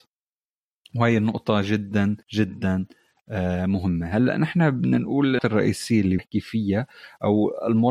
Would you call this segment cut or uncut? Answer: cut